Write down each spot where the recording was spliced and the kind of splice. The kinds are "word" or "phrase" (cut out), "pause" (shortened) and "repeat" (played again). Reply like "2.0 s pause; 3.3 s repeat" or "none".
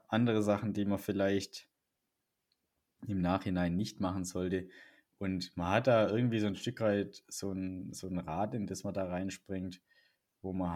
none